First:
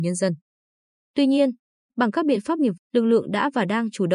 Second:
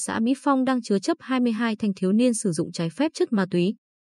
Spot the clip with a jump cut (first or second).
first